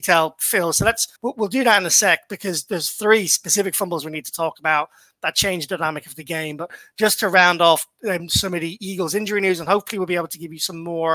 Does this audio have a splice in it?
yes; 1 cut; at 1.1 s

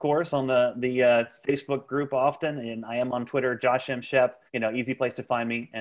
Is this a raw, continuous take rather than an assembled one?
no; 1 cut; at 4.5 s

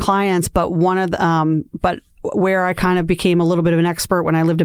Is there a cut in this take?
no; 0 cuts

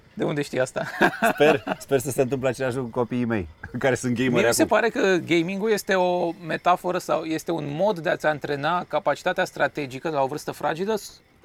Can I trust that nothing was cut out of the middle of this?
yes; 0 cuts

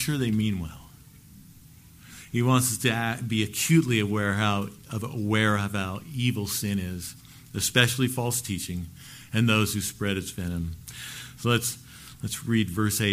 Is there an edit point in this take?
no; 0 cuts

